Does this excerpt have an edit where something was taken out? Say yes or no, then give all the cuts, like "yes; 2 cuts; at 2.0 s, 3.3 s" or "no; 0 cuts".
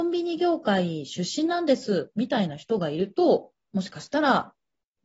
yes; 1 cut; at 3.6 s